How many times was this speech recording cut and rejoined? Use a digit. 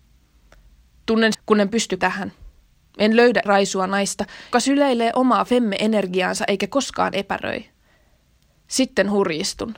4